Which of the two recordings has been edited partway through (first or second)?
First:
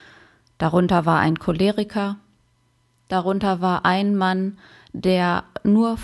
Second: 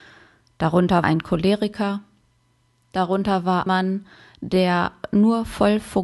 second